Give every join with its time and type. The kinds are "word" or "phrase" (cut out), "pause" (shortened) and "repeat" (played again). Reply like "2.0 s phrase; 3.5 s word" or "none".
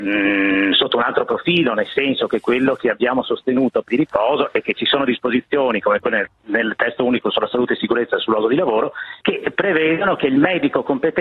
3.9 s phrase; 9.2 s pause